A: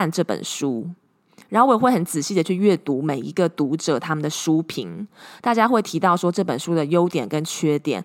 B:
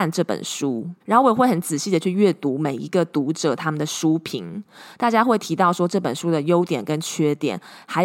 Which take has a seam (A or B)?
B